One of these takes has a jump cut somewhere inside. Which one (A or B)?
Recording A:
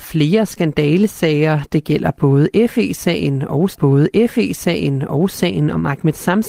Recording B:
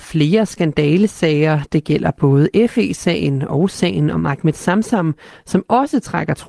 A